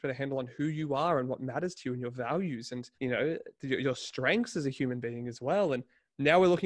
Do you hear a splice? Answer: yes; 2 cuts; at 2.9 s, 3.5 s

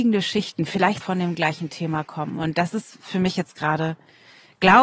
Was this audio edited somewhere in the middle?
yes; 1 cut; at 1.0 s

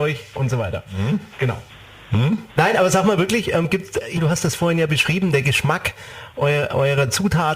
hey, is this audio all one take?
no; 2 cuts; at 2.5 s, 4.2 s

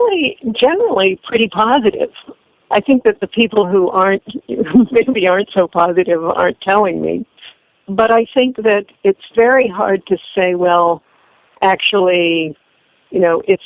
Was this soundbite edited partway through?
no; 0 cuts

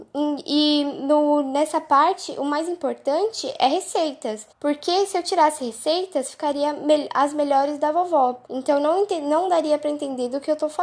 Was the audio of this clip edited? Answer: yes; 2 cuts; at 4.5 s, 8.5 s

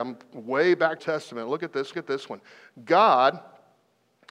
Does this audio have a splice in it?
yes; 2 cuts; at 1.0 s, 1.9 s

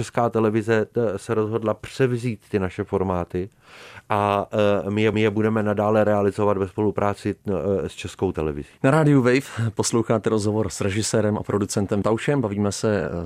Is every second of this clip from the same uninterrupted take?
no; 3 cuts; at 5.1 s, 8.8 s, 12.0 s

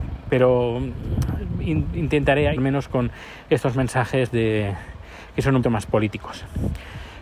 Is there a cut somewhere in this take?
yes; 3 cuts; at 2.6 s, 4.3 s, 5.6 s

